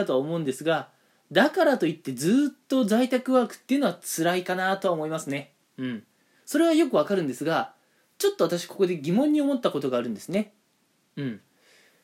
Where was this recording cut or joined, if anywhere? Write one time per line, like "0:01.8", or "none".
none